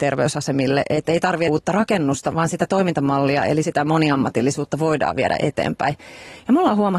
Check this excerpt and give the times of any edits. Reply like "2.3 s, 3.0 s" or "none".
1.5 s, 2.3 s, 3.6 s